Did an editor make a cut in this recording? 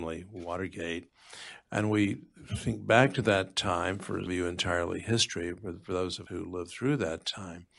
yes; 2 cuts; at 4.3 s, 6.3 s

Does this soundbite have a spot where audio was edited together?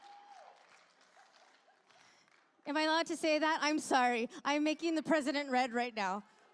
no; 0 cuts

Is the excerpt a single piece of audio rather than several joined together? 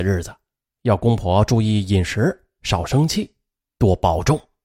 yes; 0 cuts

